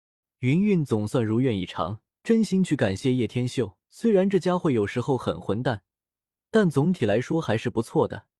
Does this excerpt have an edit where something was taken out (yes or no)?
yes